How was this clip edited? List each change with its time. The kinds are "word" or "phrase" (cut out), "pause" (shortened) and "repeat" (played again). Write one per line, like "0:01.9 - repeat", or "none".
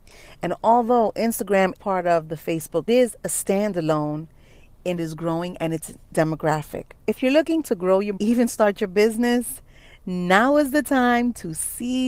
0:01.8 - word
0:02.9 - phrase
0:05.0 - phrase
0:07.0 - pause
0:08.2 - phrase